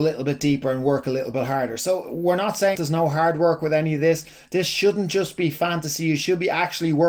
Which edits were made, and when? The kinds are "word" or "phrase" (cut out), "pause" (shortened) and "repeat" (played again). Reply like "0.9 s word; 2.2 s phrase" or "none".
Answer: 2.8 s word